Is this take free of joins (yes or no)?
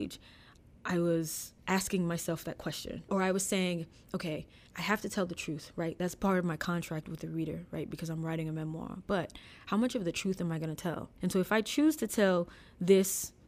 yes